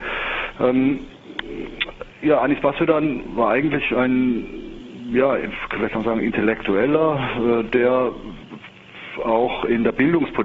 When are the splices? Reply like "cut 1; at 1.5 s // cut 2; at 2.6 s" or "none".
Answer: none